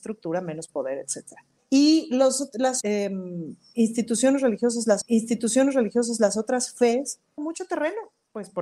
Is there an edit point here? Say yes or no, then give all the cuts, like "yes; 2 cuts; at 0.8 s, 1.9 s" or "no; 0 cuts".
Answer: yes; 4 cuts; at 1.6 s, 2.8 s, 5.0 s, 7.4 s